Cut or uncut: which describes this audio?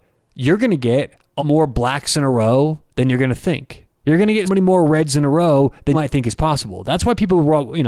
cut